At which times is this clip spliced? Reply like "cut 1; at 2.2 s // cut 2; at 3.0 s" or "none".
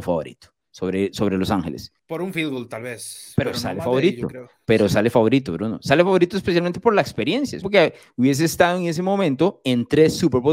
cut 1; at 2.0 s // cut 2; at 7.6 s